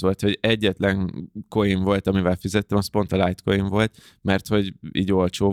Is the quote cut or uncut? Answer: uncut